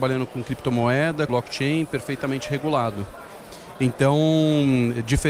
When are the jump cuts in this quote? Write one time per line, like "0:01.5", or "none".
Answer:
0:01.3